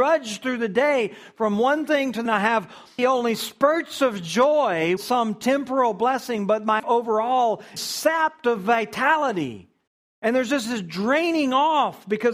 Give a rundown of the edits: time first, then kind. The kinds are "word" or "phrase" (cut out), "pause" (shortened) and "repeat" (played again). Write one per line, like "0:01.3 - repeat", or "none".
0:02.3 - phrase
0:03.0 - word
0:05.0 - word
0:06.8 - word
0:07.8 - word
0:09.9 - pause
0:10.6 - word